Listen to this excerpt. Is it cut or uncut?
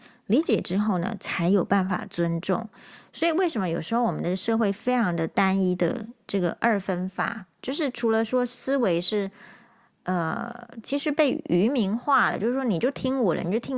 uncut